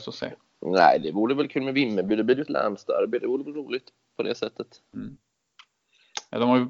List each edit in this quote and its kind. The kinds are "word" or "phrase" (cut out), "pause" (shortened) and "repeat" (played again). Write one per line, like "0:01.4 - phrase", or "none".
0:04.9 - pause